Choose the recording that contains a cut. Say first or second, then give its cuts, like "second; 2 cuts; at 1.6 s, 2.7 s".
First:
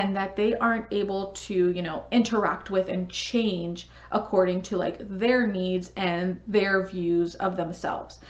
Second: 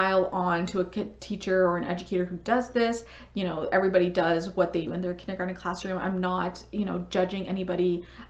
second; 1 cut; at 4.9 s